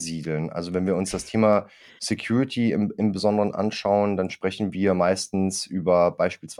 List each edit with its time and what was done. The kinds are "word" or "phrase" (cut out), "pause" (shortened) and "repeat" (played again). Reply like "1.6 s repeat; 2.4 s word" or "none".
none

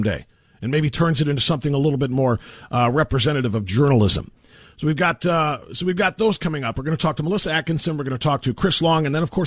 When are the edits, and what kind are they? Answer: none

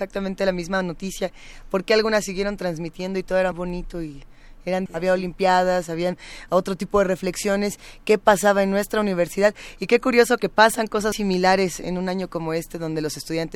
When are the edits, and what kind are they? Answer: 3.5 s word; 4.9 s phrase; 11.1 s word

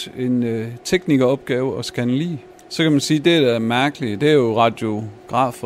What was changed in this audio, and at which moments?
2.5 s pause

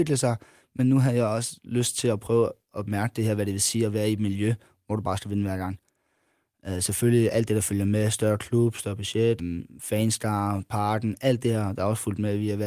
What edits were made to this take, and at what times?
9.4 s word

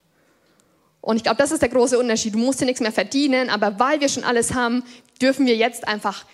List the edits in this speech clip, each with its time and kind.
none

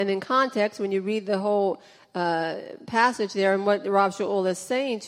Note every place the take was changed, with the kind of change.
none

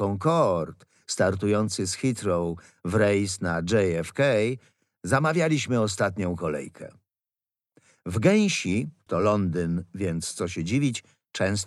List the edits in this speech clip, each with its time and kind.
9.1 s word

